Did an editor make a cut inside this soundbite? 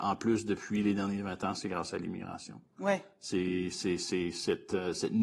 no; 0 cuts

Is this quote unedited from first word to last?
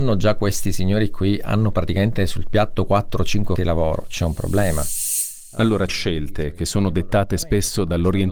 no; 2 cuts; at 3.6 s, 5.9 s

